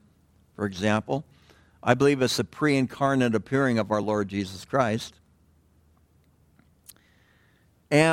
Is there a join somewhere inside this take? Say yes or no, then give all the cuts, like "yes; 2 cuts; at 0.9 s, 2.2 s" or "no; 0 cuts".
no; 0 cuts